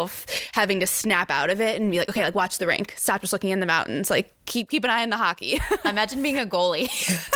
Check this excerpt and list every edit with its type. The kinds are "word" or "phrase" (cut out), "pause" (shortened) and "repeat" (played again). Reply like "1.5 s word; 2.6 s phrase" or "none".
none